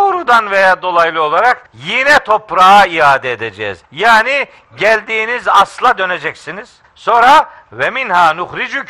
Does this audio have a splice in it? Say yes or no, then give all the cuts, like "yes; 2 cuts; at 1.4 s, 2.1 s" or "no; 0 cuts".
yes; 3 cuts; at 1.7 s, 3.8 s, 6.8 s